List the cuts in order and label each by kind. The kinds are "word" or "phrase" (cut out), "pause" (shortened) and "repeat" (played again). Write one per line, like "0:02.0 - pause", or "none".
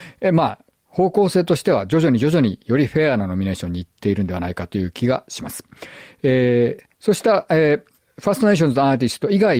0:06.9 - pause